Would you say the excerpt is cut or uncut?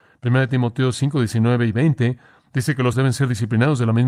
cut